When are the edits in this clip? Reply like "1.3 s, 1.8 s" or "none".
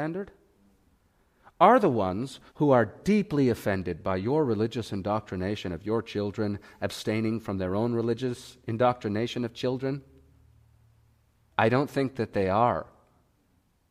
2.5 s